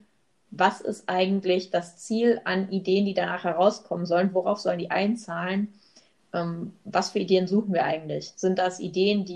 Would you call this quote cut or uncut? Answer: uncut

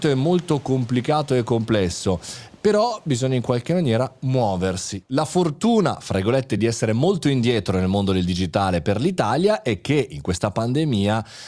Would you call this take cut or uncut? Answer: uncut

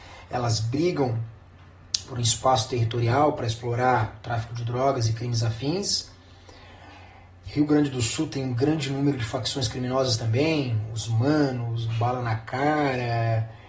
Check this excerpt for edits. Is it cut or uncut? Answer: uncut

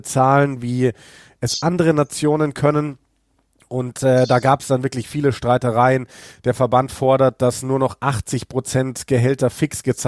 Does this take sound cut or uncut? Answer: uncut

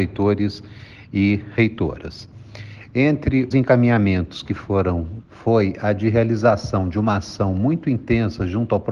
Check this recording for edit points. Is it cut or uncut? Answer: cut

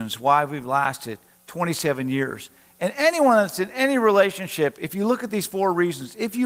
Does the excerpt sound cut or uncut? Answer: uncut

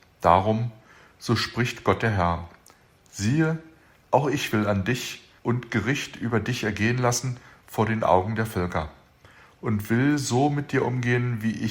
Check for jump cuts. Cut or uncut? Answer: cut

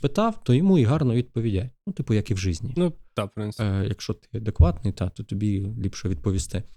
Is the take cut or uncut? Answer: uncut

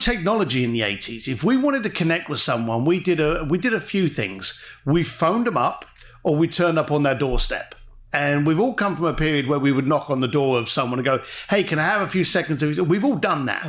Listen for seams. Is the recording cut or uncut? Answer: uncut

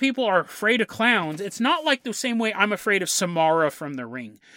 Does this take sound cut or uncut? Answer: uncut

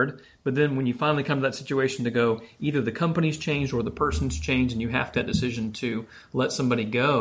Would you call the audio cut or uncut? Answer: cut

